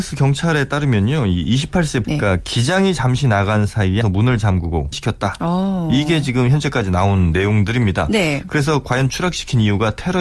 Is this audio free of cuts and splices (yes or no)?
no